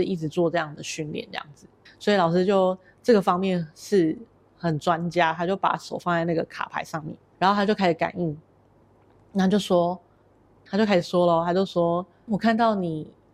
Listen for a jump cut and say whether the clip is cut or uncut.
cut